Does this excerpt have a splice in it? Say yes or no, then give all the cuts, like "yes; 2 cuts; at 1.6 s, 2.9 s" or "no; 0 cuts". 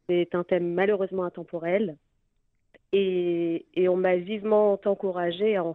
no; 0 cuts